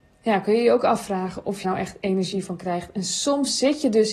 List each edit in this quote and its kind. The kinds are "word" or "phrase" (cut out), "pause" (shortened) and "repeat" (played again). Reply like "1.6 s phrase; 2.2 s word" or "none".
1.6 s word